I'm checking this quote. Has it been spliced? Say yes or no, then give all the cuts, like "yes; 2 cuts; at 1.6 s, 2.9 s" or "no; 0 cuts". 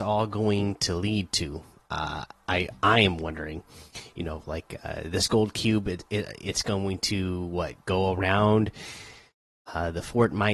no; 0 cuts